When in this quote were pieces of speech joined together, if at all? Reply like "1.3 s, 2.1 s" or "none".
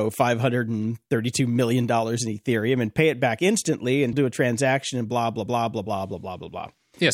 4.1 s, 5.5 s

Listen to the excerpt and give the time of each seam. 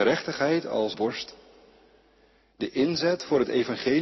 0.9 s

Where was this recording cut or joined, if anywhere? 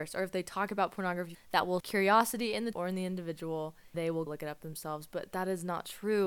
1.3 s, 1.8 s, 2.7 s, 3.9 s, 4.3 s

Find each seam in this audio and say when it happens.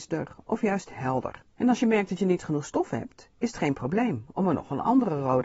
1.5 s

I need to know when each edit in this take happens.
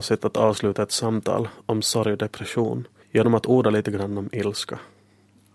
3.0 s

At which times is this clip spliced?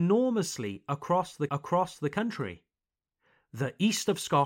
1.5 s

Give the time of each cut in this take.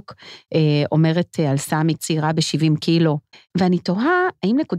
2.0 s, 3.3 s

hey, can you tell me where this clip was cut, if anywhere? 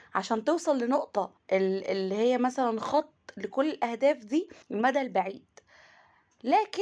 1.4 s, 4.6 s

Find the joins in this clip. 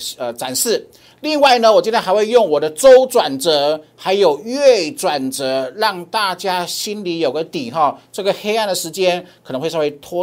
none

